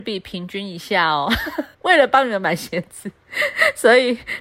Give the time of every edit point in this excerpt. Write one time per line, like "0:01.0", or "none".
0:01.7

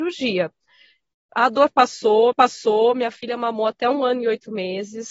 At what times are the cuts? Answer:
0:02.3

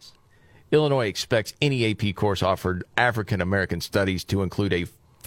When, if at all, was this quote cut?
0:02.9

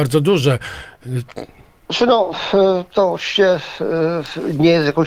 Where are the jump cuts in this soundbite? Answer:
none

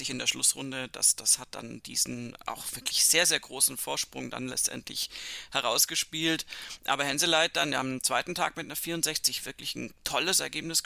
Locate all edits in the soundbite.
none

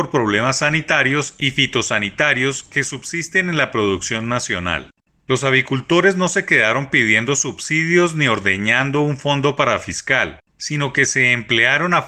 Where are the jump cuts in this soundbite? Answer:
none

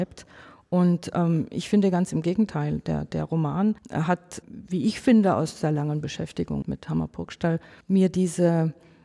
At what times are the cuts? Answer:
0:03.8
0:04.4
0:06.6
0:07.8

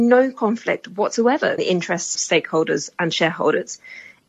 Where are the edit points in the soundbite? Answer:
0:01.6
0:02.1

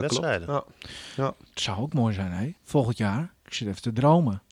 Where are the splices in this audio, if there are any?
0:01.5
0:02.6
0:03.4

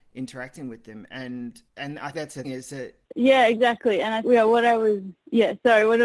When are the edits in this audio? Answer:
0:01.7
0:02.1
0:02.4
0:03.0
0:04.2

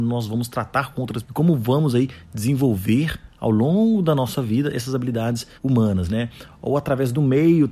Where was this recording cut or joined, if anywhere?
0:01.2
0:05.6

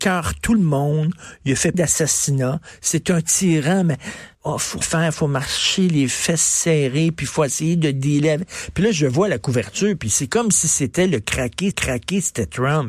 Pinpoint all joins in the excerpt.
0:01.7
0:04.3
0:04.8
0:11.7

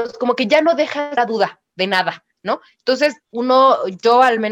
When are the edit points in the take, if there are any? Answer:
0:01.2
0:03.2

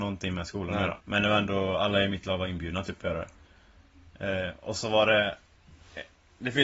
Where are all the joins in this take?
0:01.0

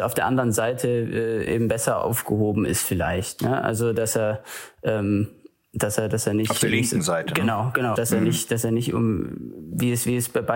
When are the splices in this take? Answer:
0:01.5
0:08.0

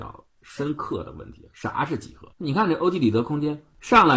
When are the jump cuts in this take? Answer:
0:02.3

